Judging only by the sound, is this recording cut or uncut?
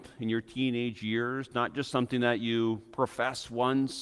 uncut